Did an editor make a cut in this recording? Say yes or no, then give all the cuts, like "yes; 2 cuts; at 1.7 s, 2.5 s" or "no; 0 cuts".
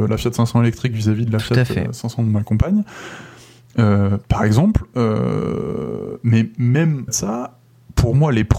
yes; 1 cut; at 7.1 s